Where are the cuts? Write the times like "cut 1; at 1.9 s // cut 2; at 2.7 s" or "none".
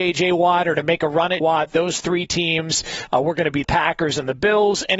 cut 1; at 1.4 s // cut 2; at 3.6 s